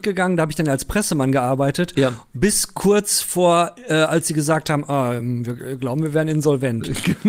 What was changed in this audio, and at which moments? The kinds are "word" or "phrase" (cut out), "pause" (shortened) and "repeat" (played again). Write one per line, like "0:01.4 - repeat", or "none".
none